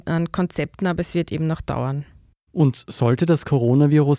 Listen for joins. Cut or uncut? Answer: uncut